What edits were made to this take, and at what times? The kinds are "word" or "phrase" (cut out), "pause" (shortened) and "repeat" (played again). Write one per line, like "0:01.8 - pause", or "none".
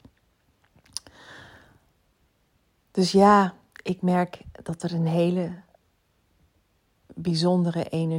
none